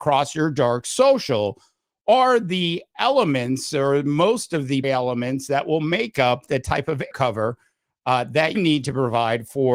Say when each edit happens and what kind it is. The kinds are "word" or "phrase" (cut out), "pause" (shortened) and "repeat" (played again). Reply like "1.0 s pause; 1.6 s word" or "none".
4.8 s word; 7.1 s word; 8.5 s word